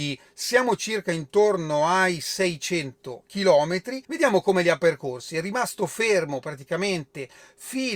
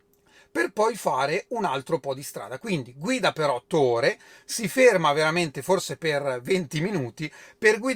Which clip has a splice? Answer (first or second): first